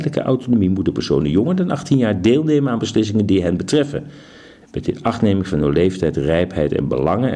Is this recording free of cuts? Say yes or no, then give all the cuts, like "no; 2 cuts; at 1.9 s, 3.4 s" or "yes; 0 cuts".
yes; 0 cuts